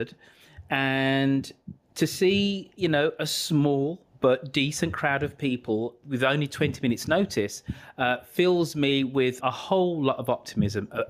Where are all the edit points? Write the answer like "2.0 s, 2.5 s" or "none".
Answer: 6.0 s, 9.4 s